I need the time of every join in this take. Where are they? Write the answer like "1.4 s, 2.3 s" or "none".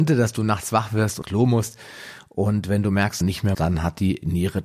1.2 s, 3.2 s, 3.5 s